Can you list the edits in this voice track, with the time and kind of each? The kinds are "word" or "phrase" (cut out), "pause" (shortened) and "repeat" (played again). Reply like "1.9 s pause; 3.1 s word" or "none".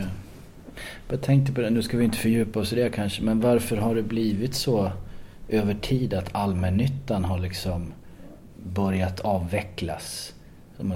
none